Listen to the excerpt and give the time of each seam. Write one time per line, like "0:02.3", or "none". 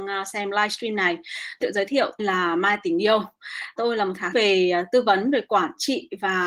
0:01.6
0:02.2
0:03.8
0:04.3